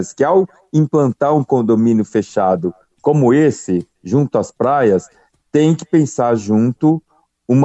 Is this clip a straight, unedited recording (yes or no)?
yes